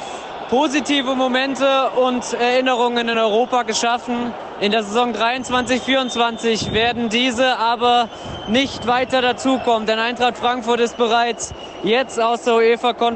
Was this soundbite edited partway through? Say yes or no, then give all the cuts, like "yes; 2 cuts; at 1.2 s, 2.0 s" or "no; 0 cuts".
no; 0 cuts